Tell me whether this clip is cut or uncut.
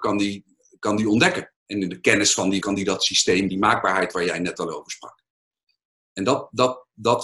cut